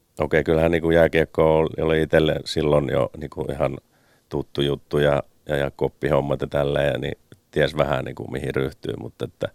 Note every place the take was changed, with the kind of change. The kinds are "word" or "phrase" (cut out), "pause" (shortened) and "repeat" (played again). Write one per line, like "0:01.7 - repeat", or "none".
none